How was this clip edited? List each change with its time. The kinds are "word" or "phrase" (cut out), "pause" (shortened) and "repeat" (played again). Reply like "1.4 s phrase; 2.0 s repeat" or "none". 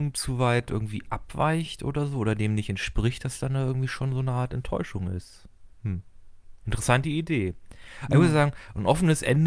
5.7 s pause